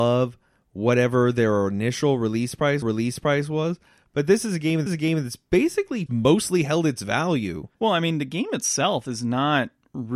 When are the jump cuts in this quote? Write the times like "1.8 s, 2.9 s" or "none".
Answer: 2.8 s, 4.9 s, 6.1 s, 7.7 s